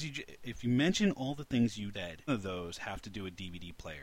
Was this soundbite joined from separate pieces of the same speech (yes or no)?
yes